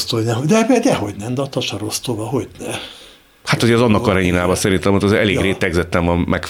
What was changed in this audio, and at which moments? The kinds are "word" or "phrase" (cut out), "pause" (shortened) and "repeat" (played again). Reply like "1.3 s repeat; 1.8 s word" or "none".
none